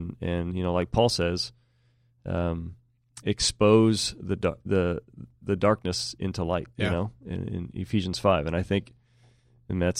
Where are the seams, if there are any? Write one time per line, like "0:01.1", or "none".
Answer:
0:06.7